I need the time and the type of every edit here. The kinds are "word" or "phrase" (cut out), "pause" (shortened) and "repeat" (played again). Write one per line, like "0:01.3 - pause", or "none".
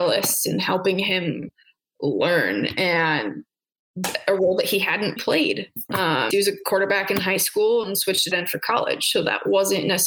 0:05.2 - word
0:06.3 - word
0:08.3 - word